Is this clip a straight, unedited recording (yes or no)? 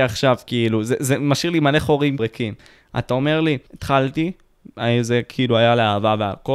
no